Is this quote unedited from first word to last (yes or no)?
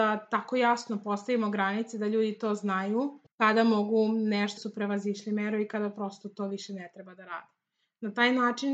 no